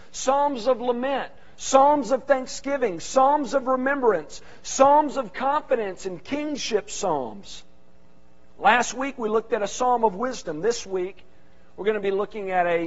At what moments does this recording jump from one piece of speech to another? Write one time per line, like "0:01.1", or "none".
none